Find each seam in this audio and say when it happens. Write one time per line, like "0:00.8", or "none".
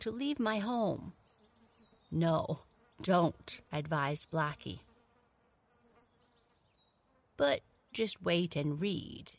0:03.7
0:07.9